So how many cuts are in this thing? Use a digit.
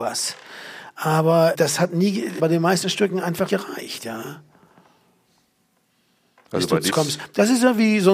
4